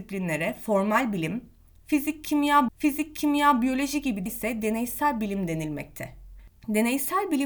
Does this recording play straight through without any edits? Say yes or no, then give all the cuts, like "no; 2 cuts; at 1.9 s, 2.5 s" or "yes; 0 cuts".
no; 2 cuts; at 2.7 s, 4.3 s